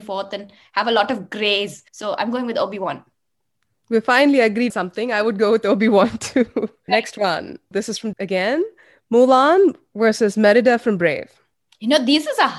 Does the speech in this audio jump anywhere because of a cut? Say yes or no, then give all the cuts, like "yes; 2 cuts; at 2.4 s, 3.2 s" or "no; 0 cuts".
yes; 3 cuts; at 1.9 s, 4.7 s, 8.1 s